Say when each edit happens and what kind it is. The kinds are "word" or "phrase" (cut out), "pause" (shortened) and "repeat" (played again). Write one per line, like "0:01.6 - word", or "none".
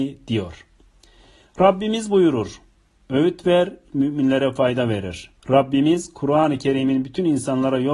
0:03.9 - phrase
0:05.4 - pause